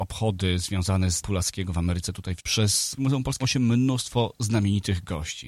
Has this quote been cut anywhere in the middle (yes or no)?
yes